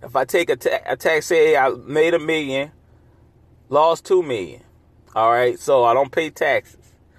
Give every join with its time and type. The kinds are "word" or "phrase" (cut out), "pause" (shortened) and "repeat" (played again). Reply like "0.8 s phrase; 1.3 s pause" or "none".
none